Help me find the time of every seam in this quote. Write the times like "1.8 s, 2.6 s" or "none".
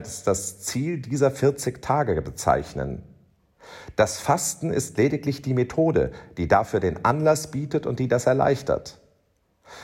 none